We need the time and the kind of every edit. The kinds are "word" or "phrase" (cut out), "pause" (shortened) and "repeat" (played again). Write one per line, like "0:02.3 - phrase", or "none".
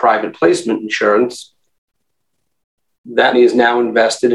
0:03.3 - word